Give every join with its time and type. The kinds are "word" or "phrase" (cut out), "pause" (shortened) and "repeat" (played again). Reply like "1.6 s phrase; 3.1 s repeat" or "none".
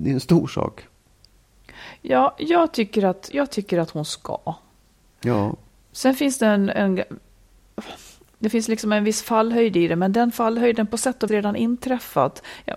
3.3 s word; 11.3 s word